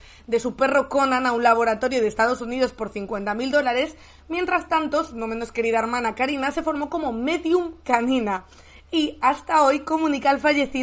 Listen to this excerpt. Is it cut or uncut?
uncut